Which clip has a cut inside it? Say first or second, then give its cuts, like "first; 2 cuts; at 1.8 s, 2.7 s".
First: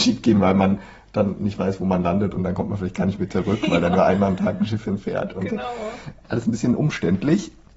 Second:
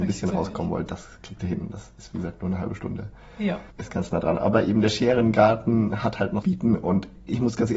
second; 2 cuts; at 3.7 s, 6.4 s